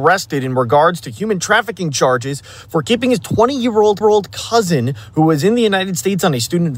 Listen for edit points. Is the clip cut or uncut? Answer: cut